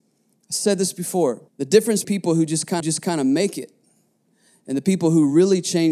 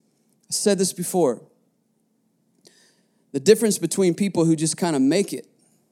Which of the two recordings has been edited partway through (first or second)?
first